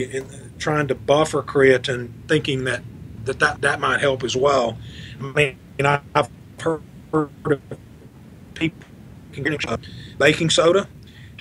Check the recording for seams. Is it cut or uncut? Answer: cut